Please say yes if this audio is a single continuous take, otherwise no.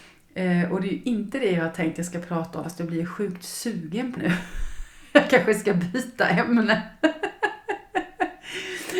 no